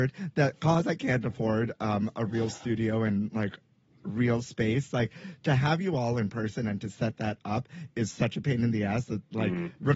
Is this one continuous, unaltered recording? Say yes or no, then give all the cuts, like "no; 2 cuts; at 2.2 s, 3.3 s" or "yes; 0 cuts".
yes; 0 cuts